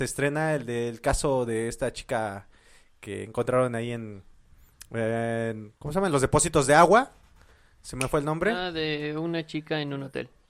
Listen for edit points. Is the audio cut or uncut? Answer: cut